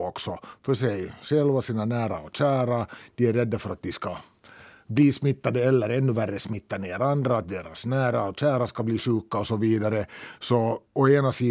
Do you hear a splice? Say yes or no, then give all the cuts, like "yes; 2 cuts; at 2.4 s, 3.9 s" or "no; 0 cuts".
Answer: no; 0 cuts